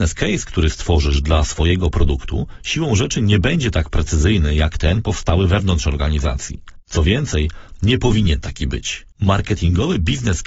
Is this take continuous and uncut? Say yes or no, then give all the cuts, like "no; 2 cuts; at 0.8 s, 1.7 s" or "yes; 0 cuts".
no; 2 cuts; at 6.8 s, 9.1 s